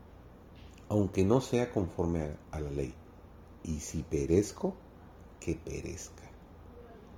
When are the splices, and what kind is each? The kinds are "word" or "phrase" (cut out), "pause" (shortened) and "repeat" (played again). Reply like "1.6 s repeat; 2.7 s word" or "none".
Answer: none